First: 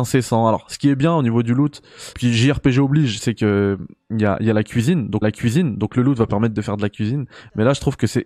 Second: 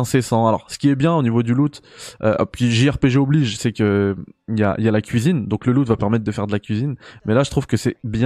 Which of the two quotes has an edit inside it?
first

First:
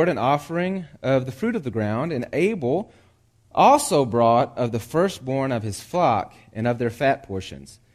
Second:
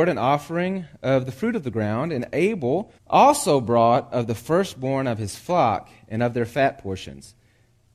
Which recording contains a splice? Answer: second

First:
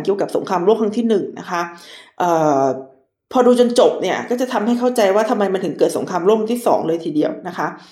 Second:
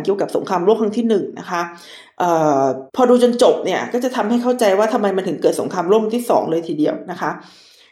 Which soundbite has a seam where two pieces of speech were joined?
second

